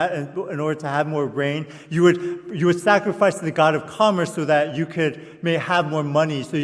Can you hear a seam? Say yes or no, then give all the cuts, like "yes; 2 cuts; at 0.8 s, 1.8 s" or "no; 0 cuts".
no; 0 cuts